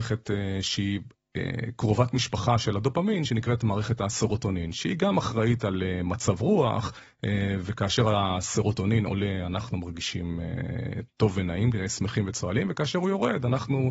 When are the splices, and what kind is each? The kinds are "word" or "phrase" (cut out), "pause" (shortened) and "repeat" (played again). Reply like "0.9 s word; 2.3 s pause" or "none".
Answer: none